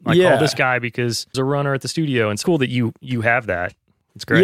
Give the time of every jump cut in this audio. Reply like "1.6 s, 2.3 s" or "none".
1.3 s, 2.4 s